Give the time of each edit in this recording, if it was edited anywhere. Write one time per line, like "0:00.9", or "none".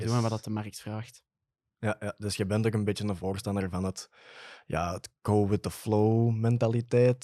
0:05.2